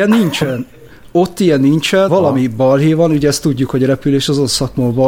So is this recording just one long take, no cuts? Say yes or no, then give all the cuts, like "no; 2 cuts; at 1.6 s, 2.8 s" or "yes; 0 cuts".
no; 1 cut; at 2.1 s